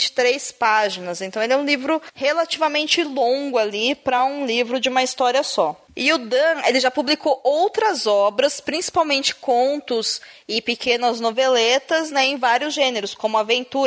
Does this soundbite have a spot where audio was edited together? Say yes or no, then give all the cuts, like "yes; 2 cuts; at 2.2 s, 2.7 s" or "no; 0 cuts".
no; 0 cuts